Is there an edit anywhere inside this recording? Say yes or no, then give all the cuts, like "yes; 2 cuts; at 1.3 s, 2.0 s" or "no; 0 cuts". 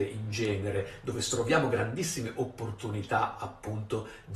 no; 0 cuts